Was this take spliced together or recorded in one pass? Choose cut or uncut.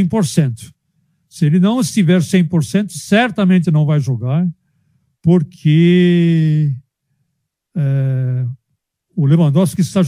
uncut